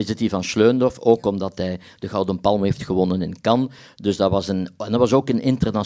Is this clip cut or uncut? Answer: uncut